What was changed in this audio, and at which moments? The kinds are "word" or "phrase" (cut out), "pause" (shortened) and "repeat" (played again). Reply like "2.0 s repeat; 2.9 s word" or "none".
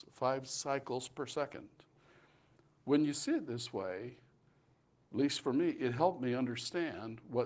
none